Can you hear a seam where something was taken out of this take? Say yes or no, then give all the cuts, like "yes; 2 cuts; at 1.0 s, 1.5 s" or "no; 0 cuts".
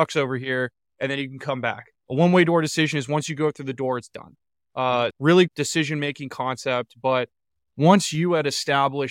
yes; 2 cuts; at 5.1 s, 5.5 s